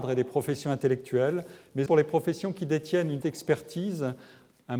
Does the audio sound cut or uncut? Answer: cut